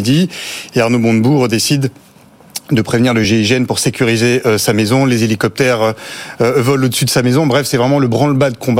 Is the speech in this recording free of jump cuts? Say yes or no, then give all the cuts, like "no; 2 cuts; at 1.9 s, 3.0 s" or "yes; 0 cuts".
yes; 0 cuts